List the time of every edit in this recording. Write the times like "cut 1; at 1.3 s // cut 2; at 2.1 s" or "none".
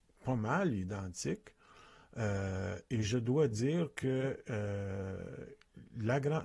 none